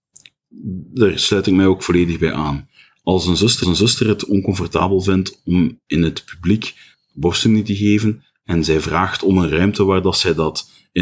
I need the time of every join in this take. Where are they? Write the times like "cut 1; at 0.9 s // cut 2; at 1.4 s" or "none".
cut 1; at 3.6 s